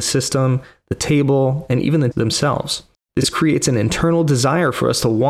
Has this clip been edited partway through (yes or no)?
yes